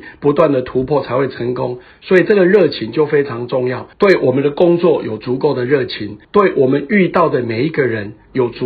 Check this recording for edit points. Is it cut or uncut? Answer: cut